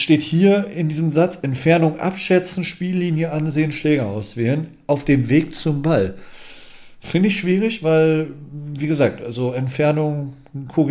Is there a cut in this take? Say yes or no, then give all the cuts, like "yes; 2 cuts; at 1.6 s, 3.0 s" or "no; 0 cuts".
no; 0 cuts